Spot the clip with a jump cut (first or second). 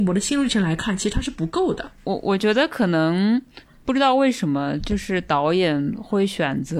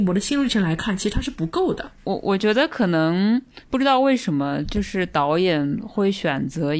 second